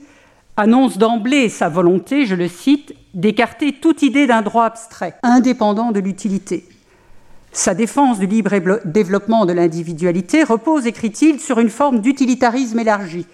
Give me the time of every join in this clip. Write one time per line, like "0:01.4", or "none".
0:05.2
0:07.4